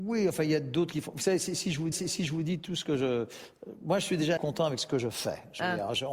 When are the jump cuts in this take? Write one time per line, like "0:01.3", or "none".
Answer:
0:01.9
0:04.4